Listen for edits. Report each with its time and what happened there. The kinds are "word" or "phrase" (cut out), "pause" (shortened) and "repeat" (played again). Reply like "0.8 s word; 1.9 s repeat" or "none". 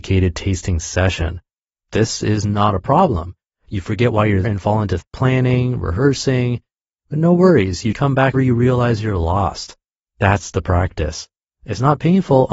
4.4 s word; 5.0 s word; 7.9 s word; 8.3 s word